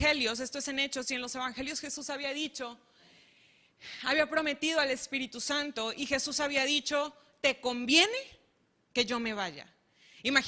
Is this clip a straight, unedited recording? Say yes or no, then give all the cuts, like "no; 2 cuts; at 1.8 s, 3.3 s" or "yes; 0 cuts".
yes; 0 cuts